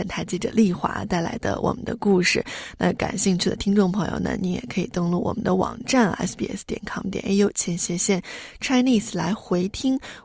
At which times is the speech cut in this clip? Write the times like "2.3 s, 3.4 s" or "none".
none

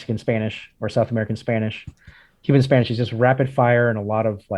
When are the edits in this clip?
none

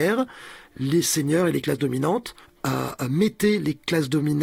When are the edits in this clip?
2.4 s

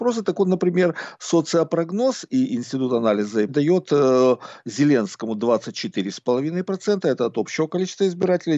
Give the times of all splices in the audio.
3.5 s

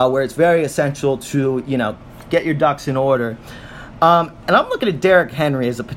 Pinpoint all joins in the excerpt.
none

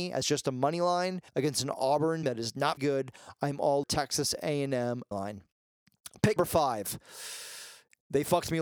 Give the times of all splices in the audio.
1.3 s, 2.2 s, 2.8 s, 3.8 s, 5.1 s, 6.4 s

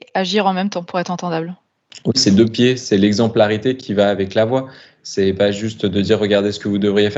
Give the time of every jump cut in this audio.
none

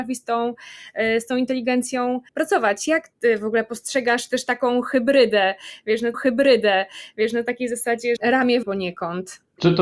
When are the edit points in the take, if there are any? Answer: 1.3 s, 2.3 s, 6.1 s, 8.2 s, 8.6 s

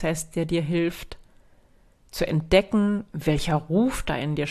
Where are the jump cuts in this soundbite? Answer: none

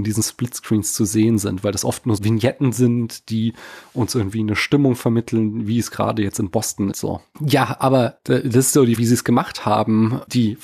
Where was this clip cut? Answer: 2.2 s, 6.9 s, 9.0 s

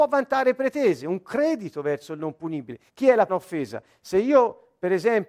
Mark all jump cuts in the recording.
2.9 s, 3.3 s

